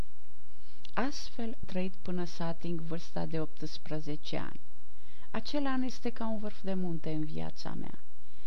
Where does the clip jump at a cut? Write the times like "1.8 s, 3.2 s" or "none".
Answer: 1.6 s